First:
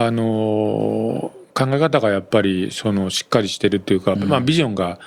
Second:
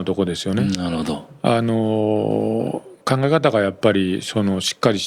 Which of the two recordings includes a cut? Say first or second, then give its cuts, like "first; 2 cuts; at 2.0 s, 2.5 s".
first; 1 cut; at 4.2 s